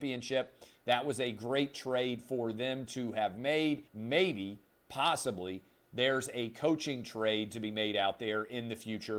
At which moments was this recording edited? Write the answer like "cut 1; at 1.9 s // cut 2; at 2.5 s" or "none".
cut 1; at 3.9 s